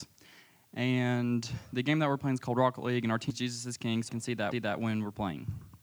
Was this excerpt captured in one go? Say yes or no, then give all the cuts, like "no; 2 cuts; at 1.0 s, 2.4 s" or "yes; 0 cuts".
no; 3 cuts; at 3.3 s, 4.1 s, 4.5 s